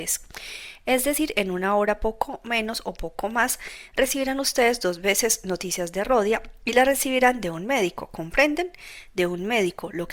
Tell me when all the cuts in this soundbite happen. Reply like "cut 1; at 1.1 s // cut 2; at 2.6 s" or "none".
none